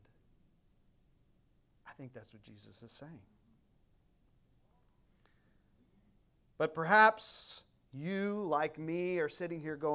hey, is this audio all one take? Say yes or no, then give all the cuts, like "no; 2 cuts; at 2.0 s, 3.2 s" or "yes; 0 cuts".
yes; 0 cuts